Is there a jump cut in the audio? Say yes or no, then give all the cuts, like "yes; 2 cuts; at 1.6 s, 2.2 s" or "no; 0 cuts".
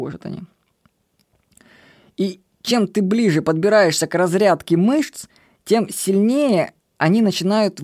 no; 0 cuts